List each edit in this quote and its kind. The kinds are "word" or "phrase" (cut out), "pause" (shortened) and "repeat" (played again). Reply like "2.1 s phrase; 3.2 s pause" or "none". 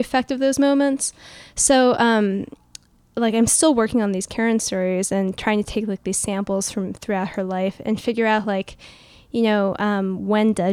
none